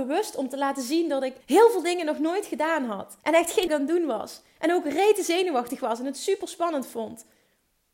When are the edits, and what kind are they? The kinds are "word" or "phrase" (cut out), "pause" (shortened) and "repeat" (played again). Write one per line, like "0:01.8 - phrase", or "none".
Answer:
0:01.4 - pause
0:03.2 - pause
0:03.7 - phrase